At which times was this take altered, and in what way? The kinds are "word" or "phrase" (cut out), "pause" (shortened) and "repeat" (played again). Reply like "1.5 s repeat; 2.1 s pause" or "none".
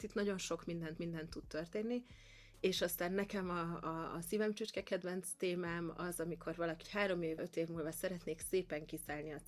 1.0 s repeat; 6.8 s phrase; 7.4 s word